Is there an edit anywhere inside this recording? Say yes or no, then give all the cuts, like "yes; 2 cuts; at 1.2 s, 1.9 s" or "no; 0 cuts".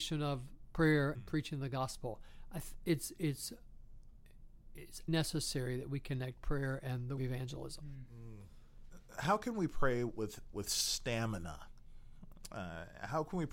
yes; 4 cuts; at 1.1 s, 5.1 s, 7.2 s, 10.5 s